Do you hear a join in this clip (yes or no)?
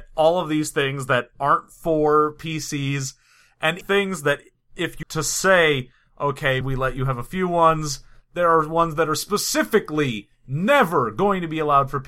yes